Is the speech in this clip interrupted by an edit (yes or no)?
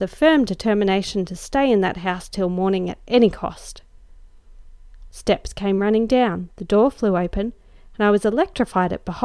no